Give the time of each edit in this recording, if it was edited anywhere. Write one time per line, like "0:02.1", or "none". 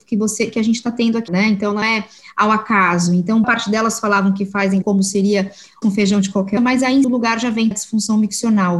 0:01.3
0:01.8
0:03.4
0:04.8
0:05.8
0:06.6
0:07.0
0:07.7